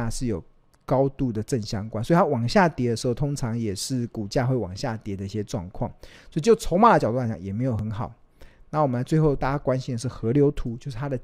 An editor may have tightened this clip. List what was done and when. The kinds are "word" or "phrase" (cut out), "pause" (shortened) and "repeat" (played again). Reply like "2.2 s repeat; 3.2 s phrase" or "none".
none